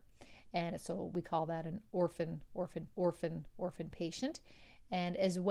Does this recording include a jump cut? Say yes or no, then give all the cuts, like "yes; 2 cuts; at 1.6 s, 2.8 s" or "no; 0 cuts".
yes; 1 cut; at 2.9 s